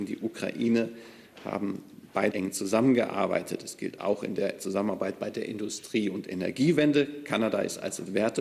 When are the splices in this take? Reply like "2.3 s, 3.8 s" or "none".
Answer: 2.3 s